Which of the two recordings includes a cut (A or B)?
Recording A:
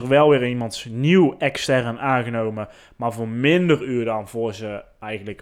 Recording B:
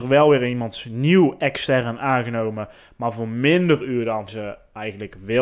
B